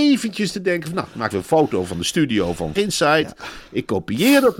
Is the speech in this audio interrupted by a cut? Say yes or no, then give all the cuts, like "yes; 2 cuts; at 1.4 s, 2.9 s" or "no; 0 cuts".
yes; 2 cuts; at 1.3 s, 2.8 s